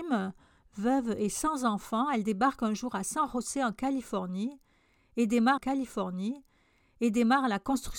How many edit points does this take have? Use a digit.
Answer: 1